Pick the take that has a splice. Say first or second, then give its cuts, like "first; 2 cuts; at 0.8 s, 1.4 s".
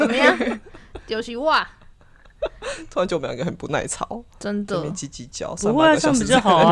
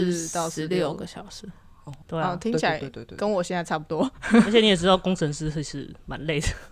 second; 1 cut; at 2.0 s